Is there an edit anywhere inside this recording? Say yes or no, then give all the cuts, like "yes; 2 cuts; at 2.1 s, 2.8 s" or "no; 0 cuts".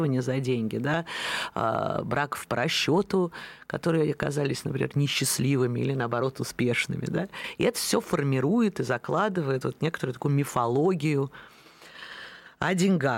no; 0 cuts